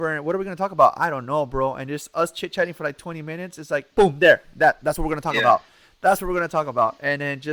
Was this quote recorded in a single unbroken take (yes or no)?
yes